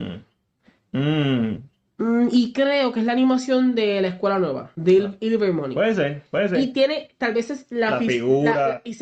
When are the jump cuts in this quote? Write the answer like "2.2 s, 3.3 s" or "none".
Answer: 4.7 s